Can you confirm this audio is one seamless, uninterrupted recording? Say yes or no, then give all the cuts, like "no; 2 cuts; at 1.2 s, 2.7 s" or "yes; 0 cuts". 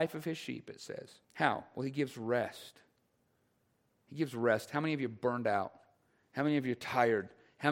no; 1 cut; at 1.2 s